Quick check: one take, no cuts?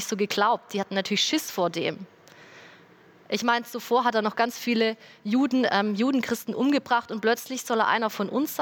yes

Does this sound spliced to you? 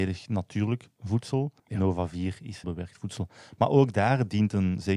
yes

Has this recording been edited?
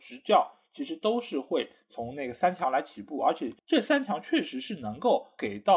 yes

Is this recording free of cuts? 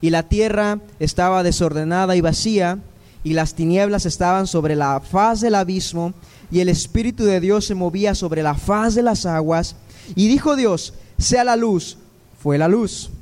yes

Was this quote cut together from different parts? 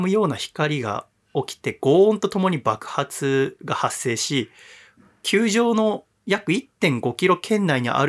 no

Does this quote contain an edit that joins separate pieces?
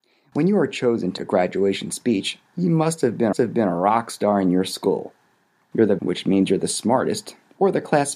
yes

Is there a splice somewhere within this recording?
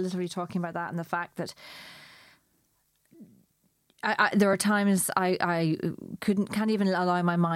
no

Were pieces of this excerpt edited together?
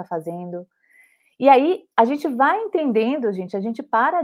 yes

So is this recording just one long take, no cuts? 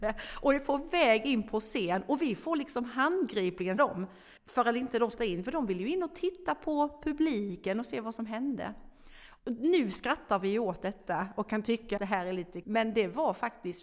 no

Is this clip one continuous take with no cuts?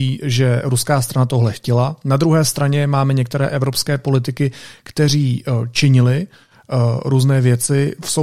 yes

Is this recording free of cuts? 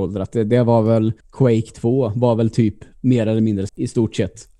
no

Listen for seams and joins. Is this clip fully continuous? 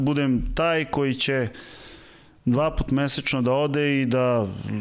yes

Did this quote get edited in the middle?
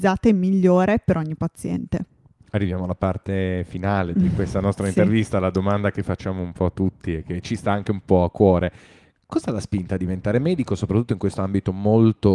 no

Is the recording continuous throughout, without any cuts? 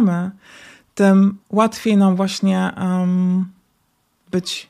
yes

